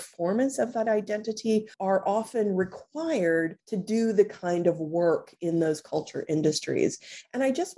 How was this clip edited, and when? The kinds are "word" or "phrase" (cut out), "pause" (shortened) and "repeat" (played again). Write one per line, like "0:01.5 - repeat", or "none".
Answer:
0:01.7 - pause
0:03.6 - pause